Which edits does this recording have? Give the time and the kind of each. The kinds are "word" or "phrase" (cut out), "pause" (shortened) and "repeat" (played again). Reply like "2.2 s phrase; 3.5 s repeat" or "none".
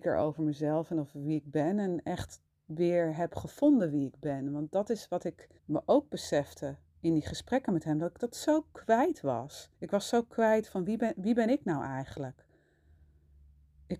2.5 s pause; 5.6 s pause; 9.7 s pause

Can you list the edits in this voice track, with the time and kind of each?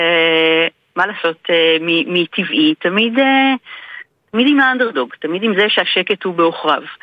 none

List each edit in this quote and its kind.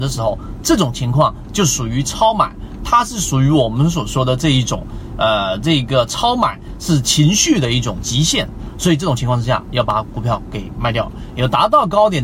none

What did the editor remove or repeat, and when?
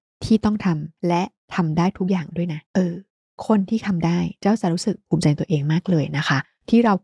2.6 s pause

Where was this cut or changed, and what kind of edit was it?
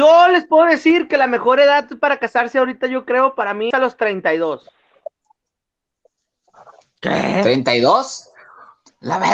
3.7 s word

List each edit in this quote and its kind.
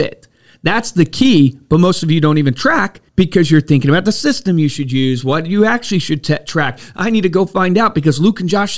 3.1 s pause

